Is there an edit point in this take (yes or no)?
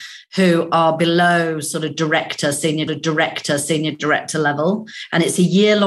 yes